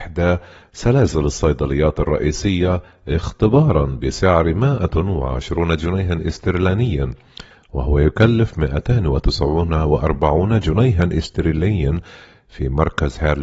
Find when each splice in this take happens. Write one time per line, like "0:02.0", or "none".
none